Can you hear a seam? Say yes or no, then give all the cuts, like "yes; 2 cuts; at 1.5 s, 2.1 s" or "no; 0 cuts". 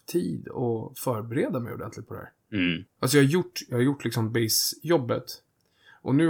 yes; 1 cut; at 2.9 s